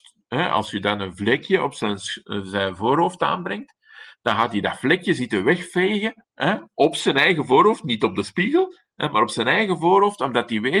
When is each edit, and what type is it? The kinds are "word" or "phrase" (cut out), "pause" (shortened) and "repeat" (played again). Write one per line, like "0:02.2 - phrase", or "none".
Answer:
0:06.2 - pause